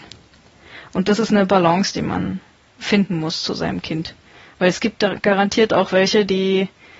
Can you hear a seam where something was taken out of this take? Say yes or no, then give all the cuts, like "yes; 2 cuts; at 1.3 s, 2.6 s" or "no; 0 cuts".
no; 0 cuts